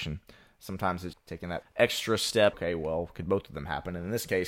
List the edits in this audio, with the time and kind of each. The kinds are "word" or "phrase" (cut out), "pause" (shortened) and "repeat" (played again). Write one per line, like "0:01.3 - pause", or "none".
0:01.1 - word
0:01.6 - word
0:02.5 - word